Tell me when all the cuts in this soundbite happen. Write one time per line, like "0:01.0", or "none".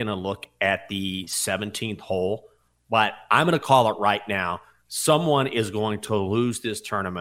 none